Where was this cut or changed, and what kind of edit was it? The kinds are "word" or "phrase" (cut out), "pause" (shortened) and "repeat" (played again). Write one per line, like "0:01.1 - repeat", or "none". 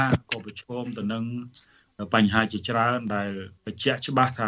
0:03.6 - pause